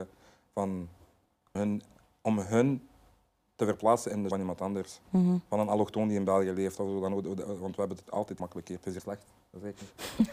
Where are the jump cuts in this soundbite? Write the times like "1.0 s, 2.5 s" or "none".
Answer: 1.6 s, 4.3 s, 8.0 s, 8.4 s, 9.0 s